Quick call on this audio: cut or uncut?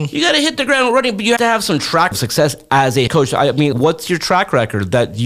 cut